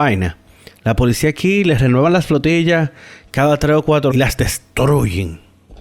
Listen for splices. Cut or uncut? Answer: cut